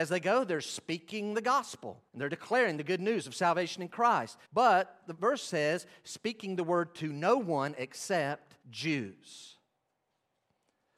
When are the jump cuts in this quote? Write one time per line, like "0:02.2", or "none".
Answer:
0:02.1
0:04.4
0:08.6